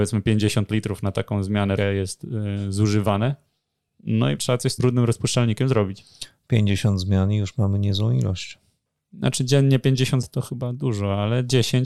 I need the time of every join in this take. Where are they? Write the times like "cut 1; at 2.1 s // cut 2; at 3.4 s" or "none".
cut 1; at 1.8 s // cut 2; at 4.4 s // cut 3; at 4.8 s // cut 4; at 10.2 s